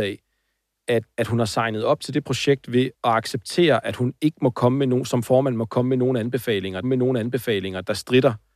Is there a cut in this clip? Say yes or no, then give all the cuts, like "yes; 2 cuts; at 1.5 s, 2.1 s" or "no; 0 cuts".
yes; 3 cuts; at 1.1 s, 2.9 s, 6.8 s